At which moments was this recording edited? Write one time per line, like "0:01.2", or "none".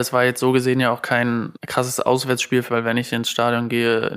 0:01.6
0:02.7

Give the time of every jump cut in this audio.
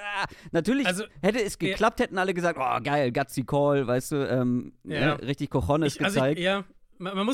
none

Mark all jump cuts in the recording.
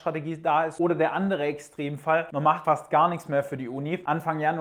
0:02.6

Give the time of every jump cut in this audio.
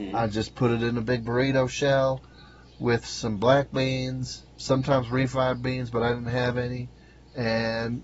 0:04.5

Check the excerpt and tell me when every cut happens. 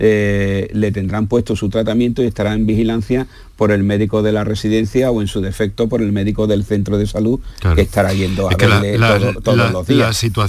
none

